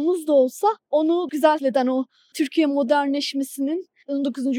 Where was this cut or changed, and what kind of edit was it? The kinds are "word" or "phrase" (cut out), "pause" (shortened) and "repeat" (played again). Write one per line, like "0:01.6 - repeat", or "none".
0:01.3 - word
0:01.6 - word
0:02.3 - word

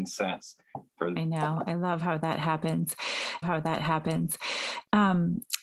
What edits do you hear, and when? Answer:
0:01.2 - phrase
0:03.4 - repeat

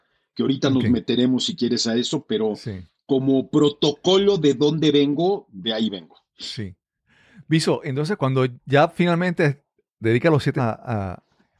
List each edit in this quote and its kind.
0:08.2 - word
0:10.6 - word

